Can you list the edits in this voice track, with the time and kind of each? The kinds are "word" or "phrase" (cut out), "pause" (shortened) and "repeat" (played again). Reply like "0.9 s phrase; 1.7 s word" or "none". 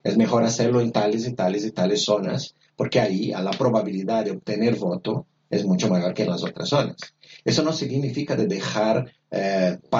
none